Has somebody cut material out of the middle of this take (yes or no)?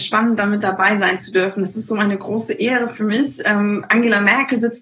no